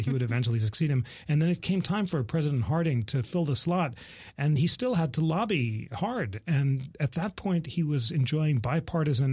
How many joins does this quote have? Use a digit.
0